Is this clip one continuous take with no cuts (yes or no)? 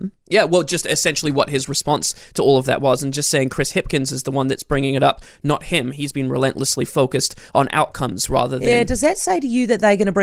yes